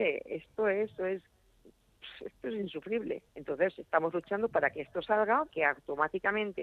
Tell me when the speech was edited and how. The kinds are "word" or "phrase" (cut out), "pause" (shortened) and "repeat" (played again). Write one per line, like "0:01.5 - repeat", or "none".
0:01.0 - word
0:03.3 - pause
0:05.5 - word